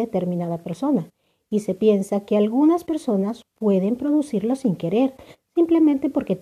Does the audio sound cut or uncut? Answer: uncut